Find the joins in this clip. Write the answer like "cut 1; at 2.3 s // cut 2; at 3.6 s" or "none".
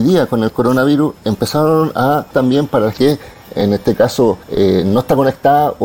cut 1; at 1.2 s // cut 2; at 2.3 s // cut 3; at 2.9 s // cut 4; at 4.4 s